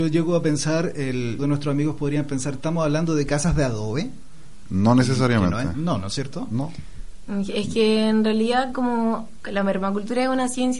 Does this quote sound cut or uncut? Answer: cut